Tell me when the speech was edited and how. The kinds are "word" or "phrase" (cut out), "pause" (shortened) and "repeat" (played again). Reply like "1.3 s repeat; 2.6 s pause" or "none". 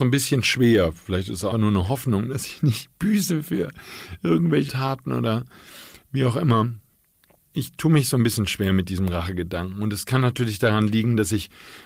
1.5 s word; 4.7 s word